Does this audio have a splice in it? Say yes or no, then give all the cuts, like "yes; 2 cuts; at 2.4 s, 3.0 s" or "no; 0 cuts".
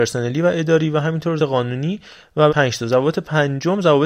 yes; 2 cuts; at 1.4 s, 2.5 s